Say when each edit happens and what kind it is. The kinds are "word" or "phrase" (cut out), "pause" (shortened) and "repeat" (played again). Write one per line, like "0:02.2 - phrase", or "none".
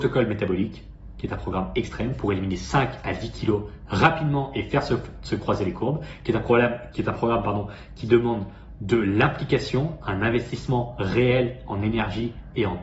none

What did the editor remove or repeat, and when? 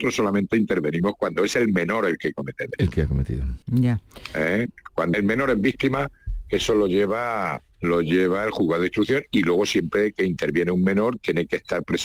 0:03.6 - pause
0:05.1 - word
0:07.7 - pause

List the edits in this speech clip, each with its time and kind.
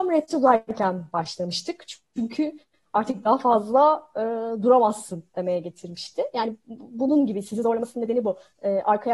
none

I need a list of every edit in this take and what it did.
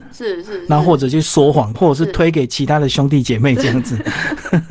0:01.7 - word

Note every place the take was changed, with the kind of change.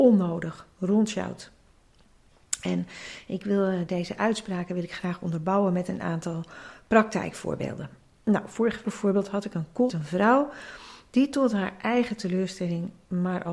0:03.9 - word
0:08.8 - word
0:09.9 - word

